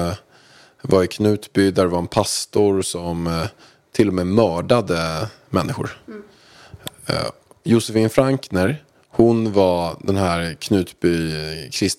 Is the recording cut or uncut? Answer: uncut